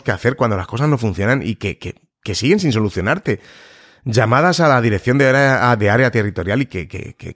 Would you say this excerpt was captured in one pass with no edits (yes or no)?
yes